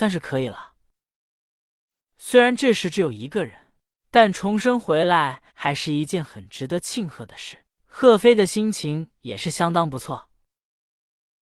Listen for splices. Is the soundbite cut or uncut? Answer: cut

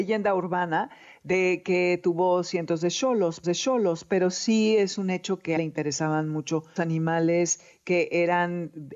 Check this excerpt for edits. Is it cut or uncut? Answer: cut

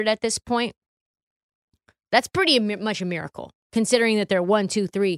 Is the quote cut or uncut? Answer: uncut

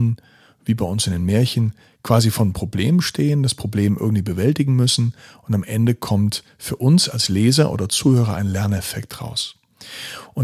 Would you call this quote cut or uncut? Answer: uncut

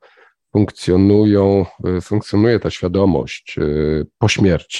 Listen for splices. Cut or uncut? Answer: uncut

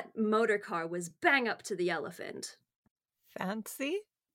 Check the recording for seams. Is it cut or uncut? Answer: uncut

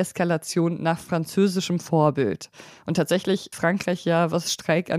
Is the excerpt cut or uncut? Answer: cut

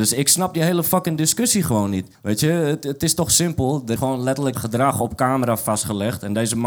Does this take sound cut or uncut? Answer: cut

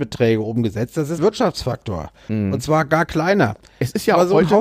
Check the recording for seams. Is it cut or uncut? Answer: cut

